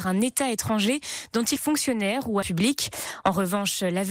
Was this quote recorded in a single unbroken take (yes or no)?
no